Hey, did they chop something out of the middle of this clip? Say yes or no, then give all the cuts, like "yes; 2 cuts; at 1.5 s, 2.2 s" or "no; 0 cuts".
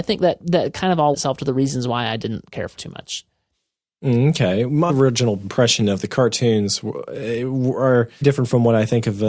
yes; 4 cuts; at 1.1 s, 2.8 s, 4.9 s, 8.2 s